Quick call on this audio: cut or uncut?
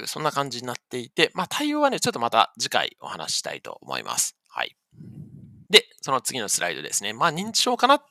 cut